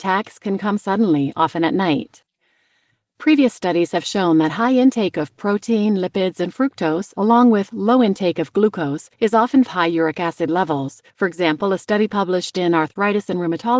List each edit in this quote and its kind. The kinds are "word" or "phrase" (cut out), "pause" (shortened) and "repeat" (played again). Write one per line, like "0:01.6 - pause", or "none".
0:09.1 - pause
0:09.6 - phrase
0:11.1 - pause